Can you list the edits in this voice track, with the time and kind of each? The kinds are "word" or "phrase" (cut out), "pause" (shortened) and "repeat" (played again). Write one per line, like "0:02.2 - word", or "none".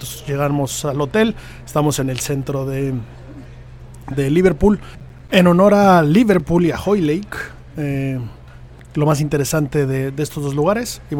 0:02.0 - phrase